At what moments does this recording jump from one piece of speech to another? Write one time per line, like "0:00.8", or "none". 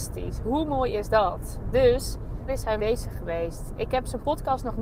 0:02.5
0:02.8